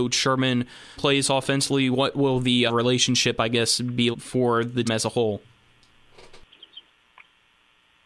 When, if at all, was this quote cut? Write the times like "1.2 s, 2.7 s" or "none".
1.0 s, 2.7 s, 4.1 s, 4.8 s